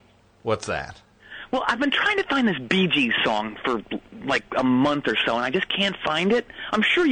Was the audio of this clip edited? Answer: no; 0 cuts

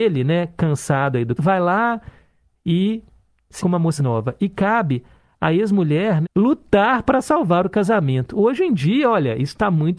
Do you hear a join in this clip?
yes; 4 cuts; at 1.4 s, 3.6 s, 4.0 s, 6.2 s

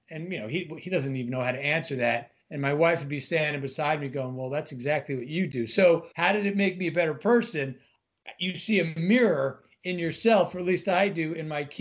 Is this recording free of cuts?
no; 2 cuts; at 2.4 s, 6.1 s

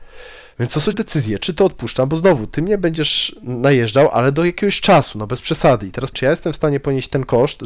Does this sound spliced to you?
yes; 3 cuts; at 0.9 s, 1.4 s, 6.1 s

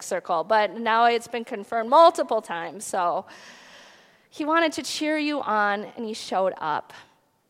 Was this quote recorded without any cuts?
yes; 0 cuts

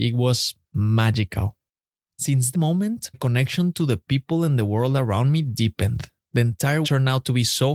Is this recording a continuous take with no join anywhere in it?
no; 3 cuts; at 2.5 s, 3.1 s, 6.8 s

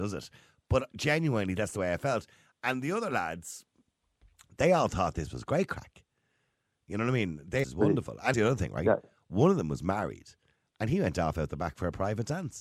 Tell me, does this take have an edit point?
yes; 2 cuts; at 7.6 s, 8.3 s

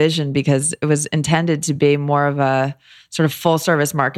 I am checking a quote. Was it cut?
no; 0 cuts

